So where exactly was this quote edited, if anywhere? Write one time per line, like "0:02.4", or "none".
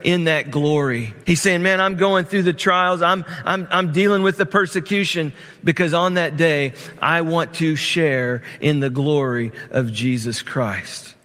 0:01.2